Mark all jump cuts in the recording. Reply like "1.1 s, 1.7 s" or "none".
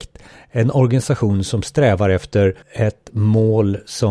2.6 s